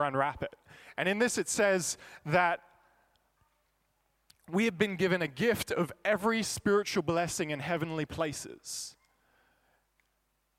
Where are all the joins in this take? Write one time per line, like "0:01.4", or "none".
none